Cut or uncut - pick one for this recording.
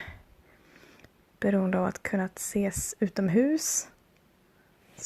uncut